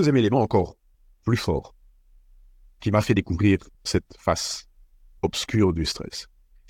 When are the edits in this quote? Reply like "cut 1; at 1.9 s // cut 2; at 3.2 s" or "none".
none